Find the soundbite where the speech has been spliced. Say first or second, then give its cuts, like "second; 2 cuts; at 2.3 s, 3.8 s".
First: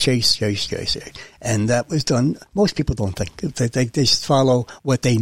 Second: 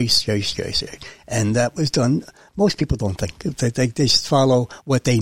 first; 1 cut; at 2.5 s